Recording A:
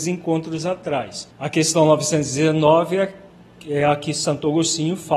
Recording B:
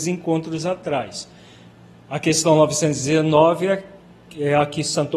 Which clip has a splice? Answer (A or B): A